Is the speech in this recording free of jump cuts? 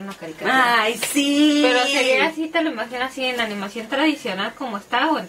yes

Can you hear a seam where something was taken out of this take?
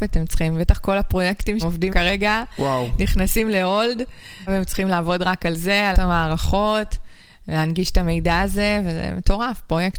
yes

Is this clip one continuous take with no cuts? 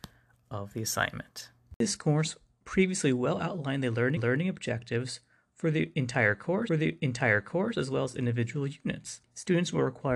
no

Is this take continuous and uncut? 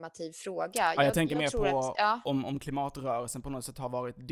yes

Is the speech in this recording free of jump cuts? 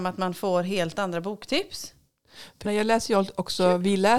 no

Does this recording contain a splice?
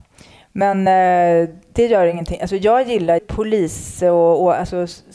yes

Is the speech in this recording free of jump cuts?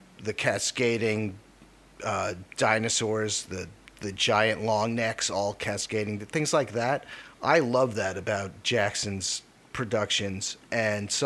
yes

